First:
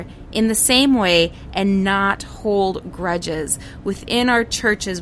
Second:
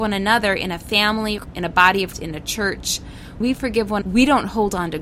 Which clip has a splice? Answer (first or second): second